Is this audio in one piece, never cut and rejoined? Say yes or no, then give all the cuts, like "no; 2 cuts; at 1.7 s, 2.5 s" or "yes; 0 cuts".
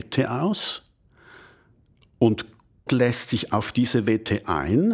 no; 1 cut; at 2.9 s